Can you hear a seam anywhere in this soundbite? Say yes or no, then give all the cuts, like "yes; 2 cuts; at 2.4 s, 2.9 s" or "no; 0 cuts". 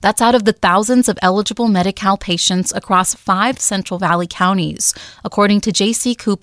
no; 0 cuts